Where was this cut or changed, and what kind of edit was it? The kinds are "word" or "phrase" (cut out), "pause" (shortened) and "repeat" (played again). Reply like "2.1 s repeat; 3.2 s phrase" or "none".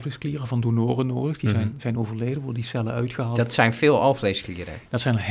none